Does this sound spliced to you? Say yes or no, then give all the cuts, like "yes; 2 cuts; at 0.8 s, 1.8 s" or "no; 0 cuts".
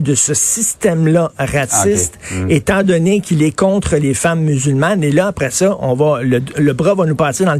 no; 0 cuts